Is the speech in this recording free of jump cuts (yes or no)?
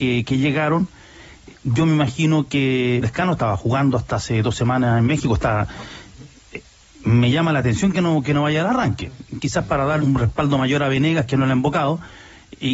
no